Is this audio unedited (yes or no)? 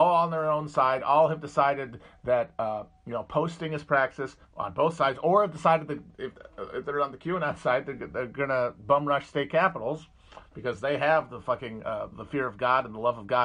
no